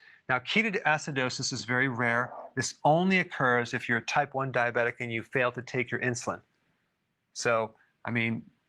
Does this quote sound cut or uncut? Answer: uncut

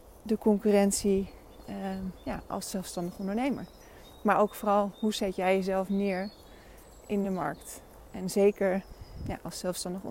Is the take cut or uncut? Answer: uncut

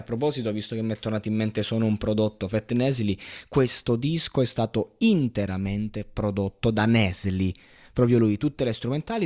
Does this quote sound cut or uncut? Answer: uncut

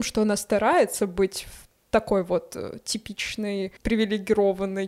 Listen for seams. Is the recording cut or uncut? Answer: cut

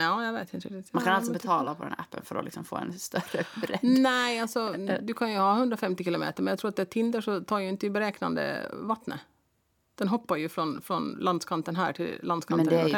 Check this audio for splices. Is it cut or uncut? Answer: uncut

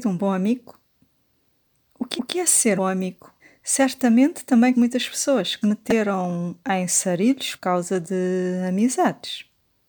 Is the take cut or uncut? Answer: cut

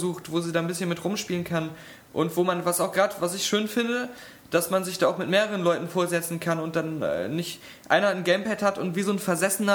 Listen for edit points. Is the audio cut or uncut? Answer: uncut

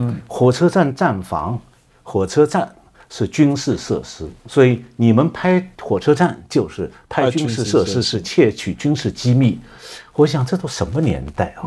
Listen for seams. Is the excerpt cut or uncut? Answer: cut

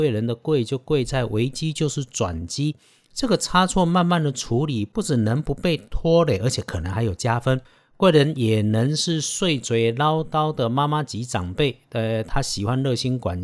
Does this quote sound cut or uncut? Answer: uncut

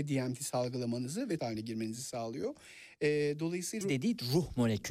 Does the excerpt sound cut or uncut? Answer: cut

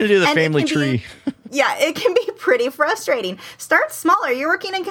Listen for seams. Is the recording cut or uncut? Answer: uncut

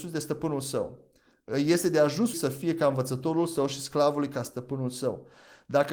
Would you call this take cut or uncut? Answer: cut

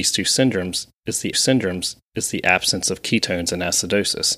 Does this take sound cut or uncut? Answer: cut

